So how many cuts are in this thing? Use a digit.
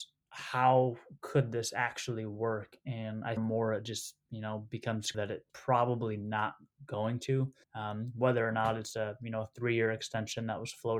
4